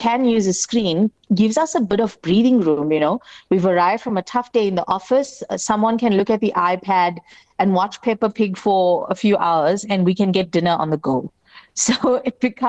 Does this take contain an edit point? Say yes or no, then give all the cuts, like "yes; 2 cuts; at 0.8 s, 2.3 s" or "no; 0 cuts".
no; 0 cuts